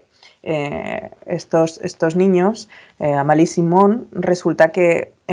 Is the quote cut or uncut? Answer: uncut